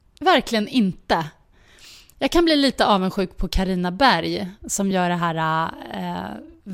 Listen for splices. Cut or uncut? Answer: uncut